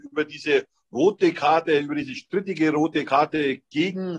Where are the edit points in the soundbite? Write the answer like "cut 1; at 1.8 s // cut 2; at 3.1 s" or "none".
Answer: none